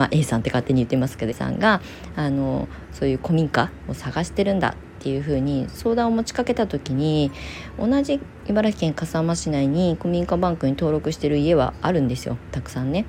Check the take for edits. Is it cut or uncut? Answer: cut